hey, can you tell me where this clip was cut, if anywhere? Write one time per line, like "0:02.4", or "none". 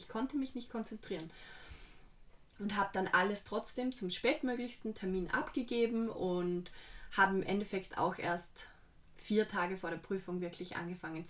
none